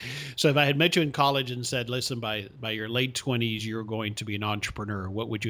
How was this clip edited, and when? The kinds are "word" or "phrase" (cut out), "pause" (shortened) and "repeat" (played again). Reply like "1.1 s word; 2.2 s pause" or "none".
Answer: none